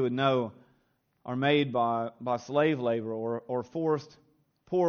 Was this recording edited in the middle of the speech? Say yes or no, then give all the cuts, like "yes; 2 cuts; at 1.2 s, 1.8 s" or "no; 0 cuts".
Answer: no; 0 cuts